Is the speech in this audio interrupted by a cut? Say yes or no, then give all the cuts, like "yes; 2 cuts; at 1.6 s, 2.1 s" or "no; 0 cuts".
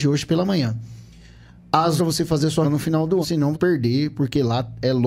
yes; 4 cuts; at 2.0 s, 2.6 s, 3.2 s, 3.5 s